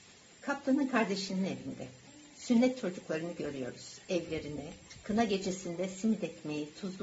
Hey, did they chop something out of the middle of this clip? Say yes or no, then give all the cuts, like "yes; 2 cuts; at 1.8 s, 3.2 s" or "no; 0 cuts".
no; 0 cuts